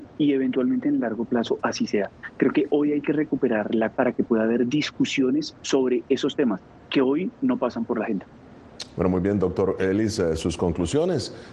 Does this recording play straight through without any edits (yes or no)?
no